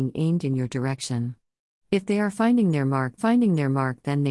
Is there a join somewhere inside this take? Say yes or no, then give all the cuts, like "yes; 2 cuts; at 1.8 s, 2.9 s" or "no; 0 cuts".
yes; 1 cut; at 3.2 s